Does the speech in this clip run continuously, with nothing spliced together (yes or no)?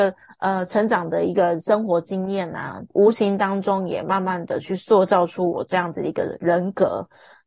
no